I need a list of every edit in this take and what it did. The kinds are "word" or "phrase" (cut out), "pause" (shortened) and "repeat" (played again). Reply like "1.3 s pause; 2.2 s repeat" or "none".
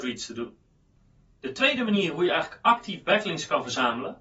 none